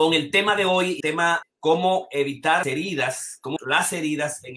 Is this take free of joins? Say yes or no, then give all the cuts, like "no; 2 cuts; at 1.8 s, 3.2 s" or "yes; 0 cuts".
no; 4 cuts; at 1.0 s, 1.4 s, 2.6 s, 3.6 s